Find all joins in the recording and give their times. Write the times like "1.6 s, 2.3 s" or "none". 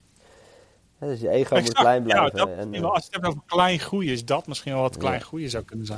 2.7 s